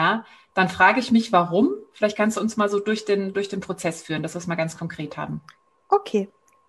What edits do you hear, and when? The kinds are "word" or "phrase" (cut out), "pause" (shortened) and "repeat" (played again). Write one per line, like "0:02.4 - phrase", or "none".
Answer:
none